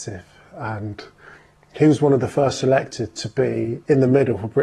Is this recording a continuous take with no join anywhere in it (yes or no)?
yes